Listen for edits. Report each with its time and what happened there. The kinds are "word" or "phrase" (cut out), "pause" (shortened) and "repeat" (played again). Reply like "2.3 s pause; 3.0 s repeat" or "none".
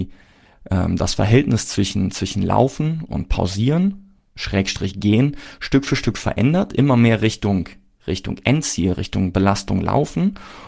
3.1 s word